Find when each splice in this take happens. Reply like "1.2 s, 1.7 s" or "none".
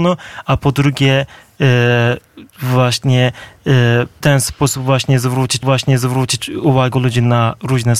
4.2 s, 5.6 s